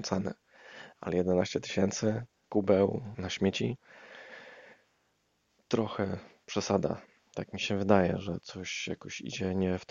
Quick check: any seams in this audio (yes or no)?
yes